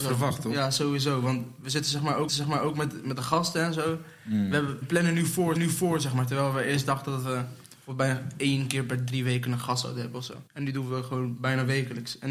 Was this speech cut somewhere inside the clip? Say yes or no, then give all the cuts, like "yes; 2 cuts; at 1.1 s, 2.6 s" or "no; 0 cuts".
yes; 4 cuts; at 2.3 s, 4.8 s, 5.6 s, 10.5 s